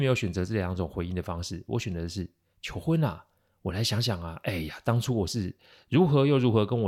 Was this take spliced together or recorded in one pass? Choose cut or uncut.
uncut